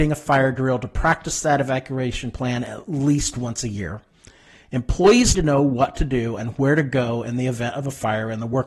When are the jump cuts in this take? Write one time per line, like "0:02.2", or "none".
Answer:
0:05.3